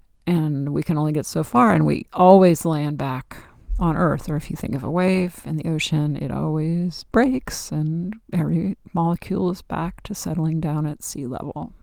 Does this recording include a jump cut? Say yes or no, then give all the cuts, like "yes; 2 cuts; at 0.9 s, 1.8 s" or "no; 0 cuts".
yes; 1 cut; at 8.2 s